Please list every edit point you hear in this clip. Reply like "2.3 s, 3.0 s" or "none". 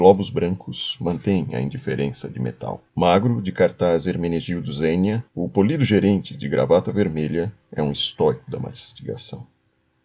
2.9 s, 5.3 s